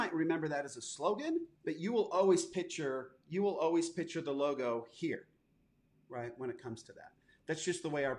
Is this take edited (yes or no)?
yes